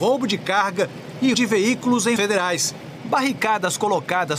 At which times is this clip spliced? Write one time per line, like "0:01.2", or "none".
0:01.3
0:02.2